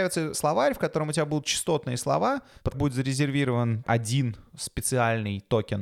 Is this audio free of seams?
no; 1 cut; at 2.7 s

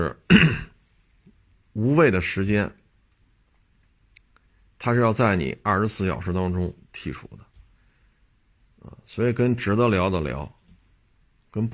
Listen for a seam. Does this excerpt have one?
no; 0 cuts

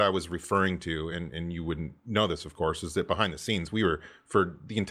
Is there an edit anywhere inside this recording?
no; 0 cuts

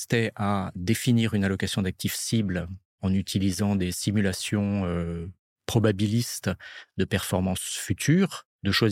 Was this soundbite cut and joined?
no; 0 cuts

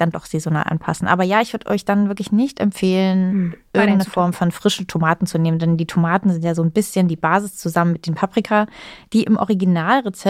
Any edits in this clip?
no; 0 cuts

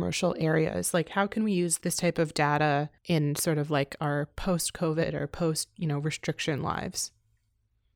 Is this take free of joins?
no; 1 cut; at 3.0 s

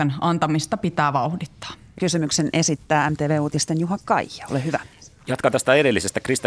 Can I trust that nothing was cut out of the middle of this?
no; 1 cut; at 2.0 s

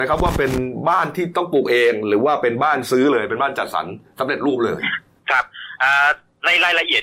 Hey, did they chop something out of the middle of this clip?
yes; 1 cut; at 5.2 s

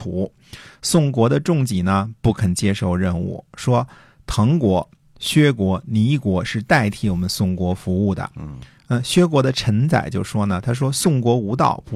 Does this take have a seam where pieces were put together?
no; 0 cuts

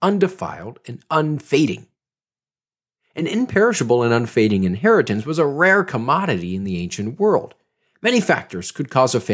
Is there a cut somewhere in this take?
no; 0 cuts

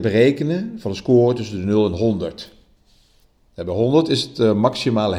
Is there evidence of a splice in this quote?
no; 0 cuts

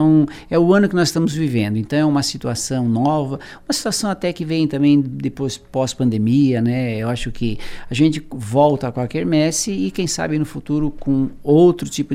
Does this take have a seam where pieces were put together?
no; 0 cuts

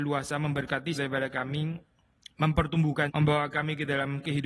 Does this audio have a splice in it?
yes; 2 cuts; at 0.9 s, 3.1 s

